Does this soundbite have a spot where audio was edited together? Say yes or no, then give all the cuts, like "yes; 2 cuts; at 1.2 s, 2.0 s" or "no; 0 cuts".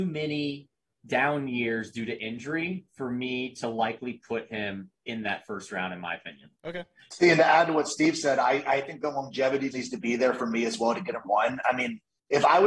yes; 4 cuts; at 2.9 s, 6.5 s, 9.7 s, 11.2 s